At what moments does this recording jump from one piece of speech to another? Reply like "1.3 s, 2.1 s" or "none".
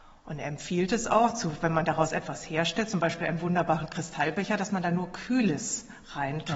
none